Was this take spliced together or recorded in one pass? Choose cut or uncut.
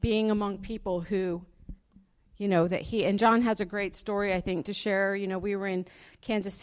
uncut